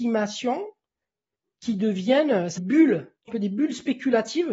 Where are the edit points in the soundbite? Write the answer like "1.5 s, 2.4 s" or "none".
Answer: 2.6 s, 3.3 s